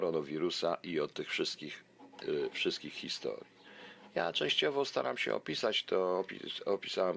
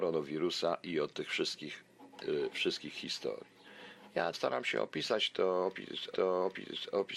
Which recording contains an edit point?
second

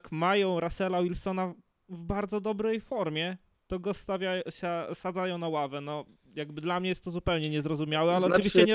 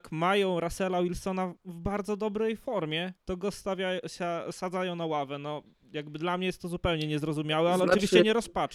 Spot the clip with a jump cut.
second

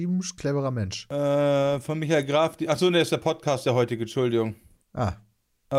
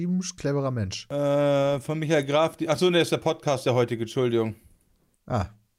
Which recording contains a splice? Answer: first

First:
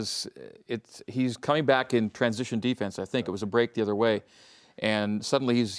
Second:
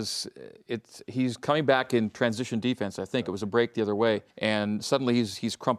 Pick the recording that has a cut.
second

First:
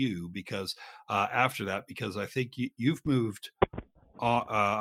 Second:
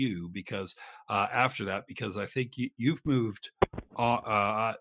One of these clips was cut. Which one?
second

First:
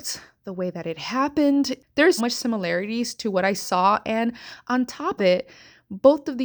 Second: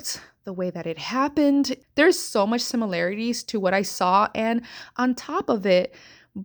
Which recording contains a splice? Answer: first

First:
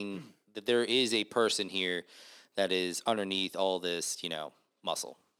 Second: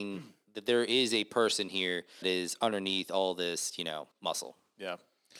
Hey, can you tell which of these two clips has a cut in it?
second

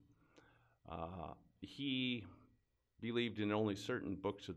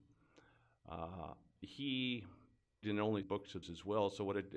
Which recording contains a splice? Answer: second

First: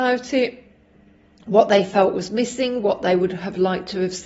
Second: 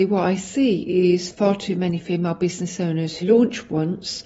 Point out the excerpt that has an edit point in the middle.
second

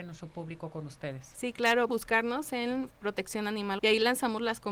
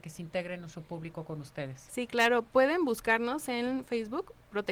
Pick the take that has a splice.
first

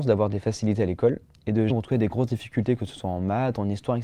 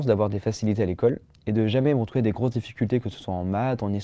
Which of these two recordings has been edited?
first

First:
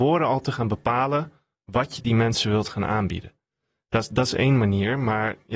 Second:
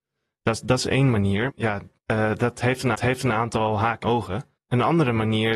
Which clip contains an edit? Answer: second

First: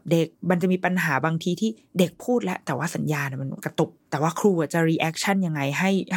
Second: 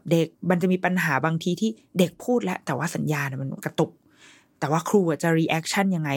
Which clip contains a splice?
first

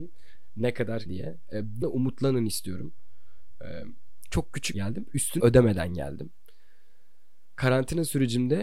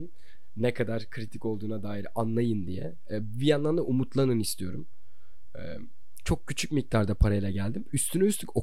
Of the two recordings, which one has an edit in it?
first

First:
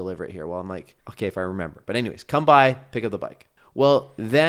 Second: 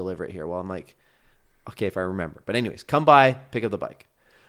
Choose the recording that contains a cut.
first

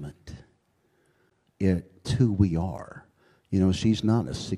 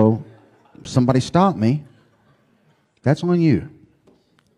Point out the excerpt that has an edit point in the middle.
first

